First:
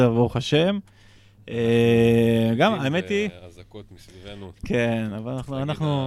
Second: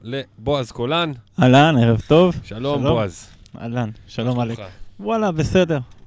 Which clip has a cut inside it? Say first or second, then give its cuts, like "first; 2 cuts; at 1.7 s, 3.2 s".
second; 1 cut; at 1.3 s